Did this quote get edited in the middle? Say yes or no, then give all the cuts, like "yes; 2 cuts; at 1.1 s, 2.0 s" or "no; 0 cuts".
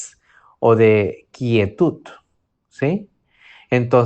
no; 0 cuts